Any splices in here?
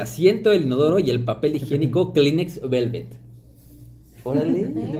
no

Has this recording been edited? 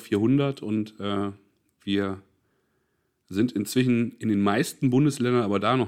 no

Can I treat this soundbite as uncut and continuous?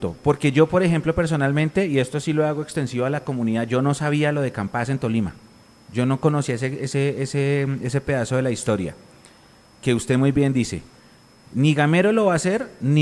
yes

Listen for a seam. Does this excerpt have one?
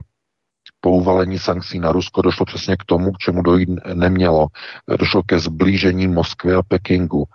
no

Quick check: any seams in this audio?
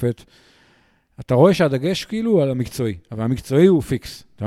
no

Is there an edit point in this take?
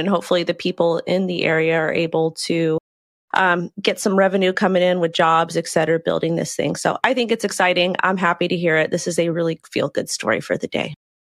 no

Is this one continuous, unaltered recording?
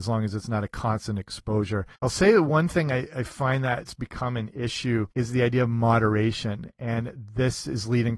no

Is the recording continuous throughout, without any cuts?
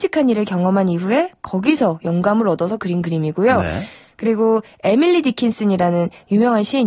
yes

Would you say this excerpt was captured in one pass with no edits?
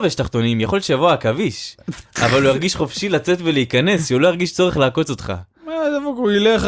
yes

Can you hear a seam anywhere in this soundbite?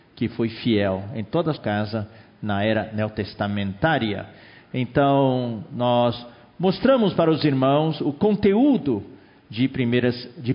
yes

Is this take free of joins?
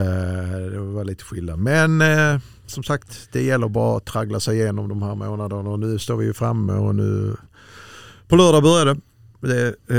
yes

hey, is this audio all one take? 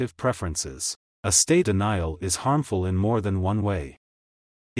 no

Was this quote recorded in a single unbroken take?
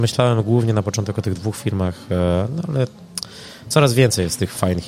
yes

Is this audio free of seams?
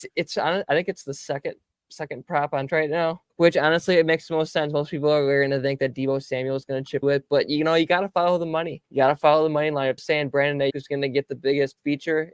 no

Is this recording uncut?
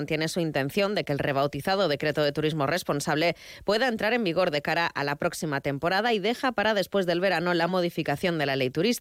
yes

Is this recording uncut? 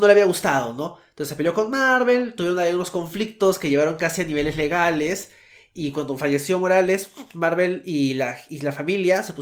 yes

